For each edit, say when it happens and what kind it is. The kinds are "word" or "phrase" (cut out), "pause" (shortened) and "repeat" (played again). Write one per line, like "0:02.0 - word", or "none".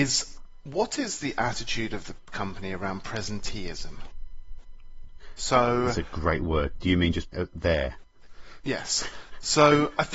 0:07.3 - word